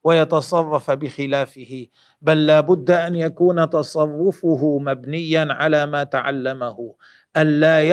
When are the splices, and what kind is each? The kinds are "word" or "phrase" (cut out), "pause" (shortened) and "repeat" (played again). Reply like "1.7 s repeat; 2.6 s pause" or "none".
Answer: none